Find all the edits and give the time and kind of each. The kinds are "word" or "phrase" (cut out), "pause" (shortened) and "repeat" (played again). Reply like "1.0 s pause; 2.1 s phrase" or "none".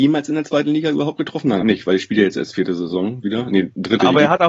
1.6 s word